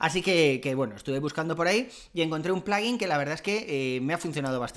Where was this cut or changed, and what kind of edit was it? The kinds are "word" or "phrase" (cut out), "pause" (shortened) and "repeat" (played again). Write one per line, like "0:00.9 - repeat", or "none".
none